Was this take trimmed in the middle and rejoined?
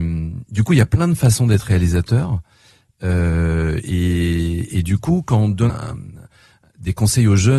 yes; 1 cut; at 5.7 s

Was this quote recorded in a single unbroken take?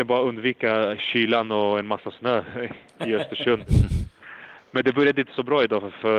yes; 0 cuts

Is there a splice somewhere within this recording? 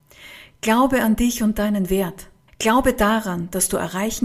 yes; 1 cut; at 2.5 s

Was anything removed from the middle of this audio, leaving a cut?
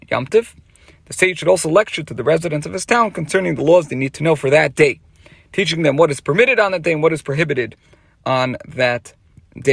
no; 0 cuts

